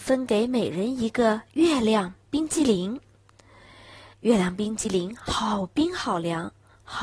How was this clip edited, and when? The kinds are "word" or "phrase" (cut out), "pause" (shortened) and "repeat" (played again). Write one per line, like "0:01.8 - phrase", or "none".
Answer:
0:04.1 - pause

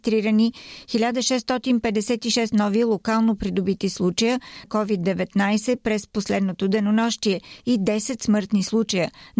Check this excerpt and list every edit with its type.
0:04.6 - word

